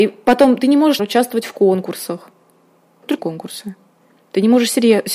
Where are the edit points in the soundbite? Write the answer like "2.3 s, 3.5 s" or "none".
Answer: 1.0 s, 3.2 s